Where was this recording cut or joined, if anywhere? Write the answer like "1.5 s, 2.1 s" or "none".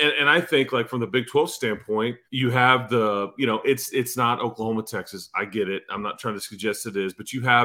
2.3 s